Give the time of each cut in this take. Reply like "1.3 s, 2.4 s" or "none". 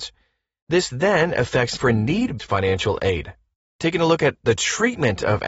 1.8 s, 2.4 s, 3.5 s